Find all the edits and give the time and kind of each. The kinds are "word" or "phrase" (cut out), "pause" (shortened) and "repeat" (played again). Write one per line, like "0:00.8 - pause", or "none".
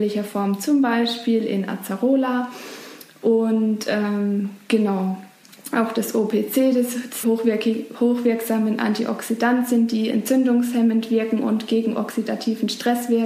0:07.2 - phrase